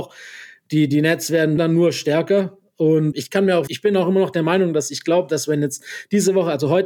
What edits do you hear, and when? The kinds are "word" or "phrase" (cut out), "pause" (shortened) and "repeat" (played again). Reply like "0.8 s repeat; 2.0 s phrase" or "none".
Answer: 1.6 s word; 3.1 s word; 3.7 s word